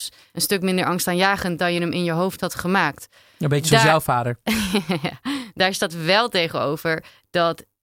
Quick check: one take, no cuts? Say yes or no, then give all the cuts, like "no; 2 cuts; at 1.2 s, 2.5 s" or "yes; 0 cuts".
yes; 0 cuts